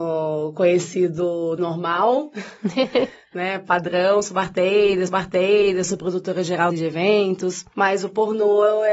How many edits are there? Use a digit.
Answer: 3